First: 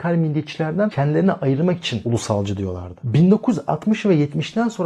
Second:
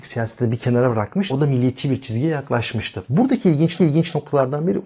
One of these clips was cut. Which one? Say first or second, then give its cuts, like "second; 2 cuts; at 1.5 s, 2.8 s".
second; 1 cut; at 3.8 s